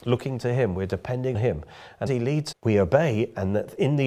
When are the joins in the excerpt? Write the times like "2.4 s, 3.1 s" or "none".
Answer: 1.3 s, 2.1 s, 2.5 s